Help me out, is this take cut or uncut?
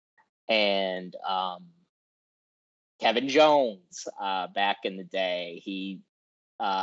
uncut